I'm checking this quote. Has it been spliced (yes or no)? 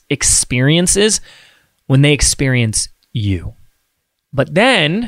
no